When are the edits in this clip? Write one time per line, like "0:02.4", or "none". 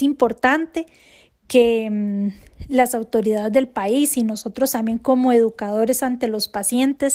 none